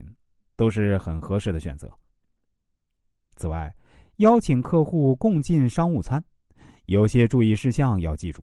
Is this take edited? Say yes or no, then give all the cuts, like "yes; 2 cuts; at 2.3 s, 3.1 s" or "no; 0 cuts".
no; 0 cuts